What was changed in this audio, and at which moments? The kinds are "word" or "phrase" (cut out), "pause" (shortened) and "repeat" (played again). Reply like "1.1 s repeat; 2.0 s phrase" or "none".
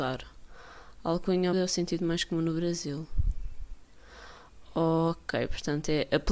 1.5 s word

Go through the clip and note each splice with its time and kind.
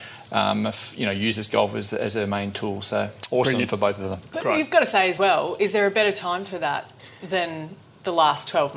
none

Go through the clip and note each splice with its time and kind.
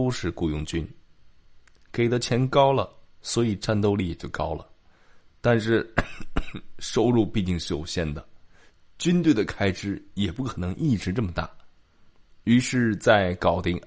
none

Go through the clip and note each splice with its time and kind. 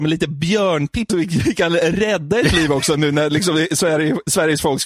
1.1 s word

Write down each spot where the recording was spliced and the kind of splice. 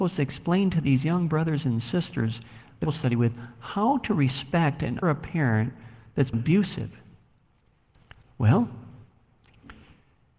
2.9 s phrase; 5.0 s word; 6.3 s word

